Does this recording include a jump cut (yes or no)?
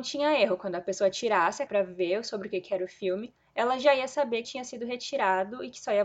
yes